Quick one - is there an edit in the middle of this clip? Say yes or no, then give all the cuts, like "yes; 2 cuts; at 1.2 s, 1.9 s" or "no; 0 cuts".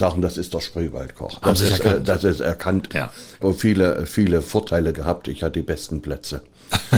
yes; 5 cuts; at 1.4 s, 2.9 s, 3.4 s, 4.9 s, 5.5 s